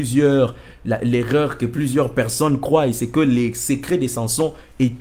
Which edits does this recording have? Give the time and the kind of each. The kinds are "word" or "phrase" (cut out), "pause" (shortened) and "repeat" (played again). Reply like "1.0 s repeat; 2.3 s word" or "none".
none